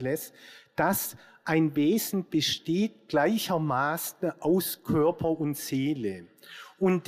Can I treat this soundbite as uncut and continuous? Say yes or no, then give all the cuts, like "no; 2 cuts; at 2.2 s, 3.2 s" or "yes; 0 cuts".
yes; 0 cuts